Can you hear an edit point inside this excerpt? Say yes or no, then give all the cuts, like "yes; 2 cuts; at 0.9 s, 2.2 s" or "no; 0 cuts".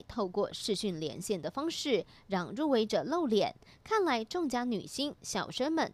no; 0 cuts